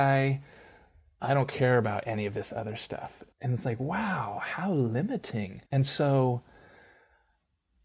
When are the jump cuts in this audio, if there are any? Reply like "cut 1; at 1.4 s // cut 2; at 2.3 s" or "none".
cut 1; at 3.3 s // cut 2; at 5.7 s

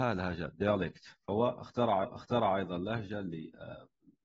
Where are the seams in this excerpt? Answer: cut 1; at 2.0 s

